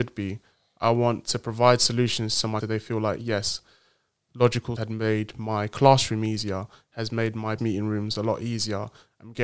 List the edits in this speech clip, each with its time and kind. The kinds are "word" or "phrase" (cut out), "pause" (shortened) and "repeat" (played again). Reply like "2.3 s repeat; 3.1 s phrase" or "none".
2.6 s word; 4.8 s word; 7.6 s word